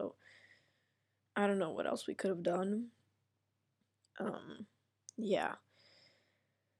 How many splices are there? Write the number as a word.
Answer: one